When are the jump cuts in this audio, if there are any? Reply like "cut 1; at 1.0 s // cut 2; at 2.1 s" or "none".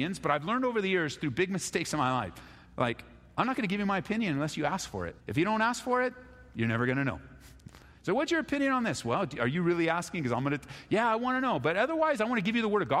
cut 1; at 2.7 s // cut 2; at 5.2 s